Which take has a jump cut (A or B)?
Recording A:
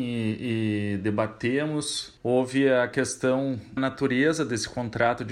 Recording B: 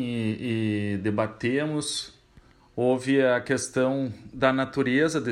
A